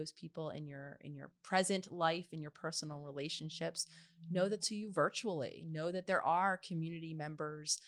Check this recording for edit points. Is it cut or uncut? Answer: cut